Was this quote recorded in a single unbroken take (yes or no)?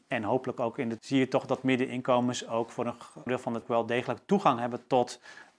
no